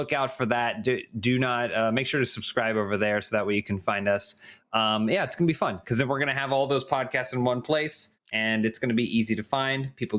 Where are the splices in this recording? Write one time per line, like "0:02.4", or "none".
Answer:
0:08.2